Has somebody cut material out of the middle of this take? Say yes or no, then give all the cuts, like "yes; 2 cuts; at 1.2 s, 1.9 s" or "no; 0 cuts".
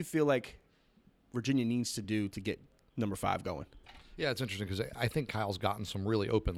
no; 0 cuts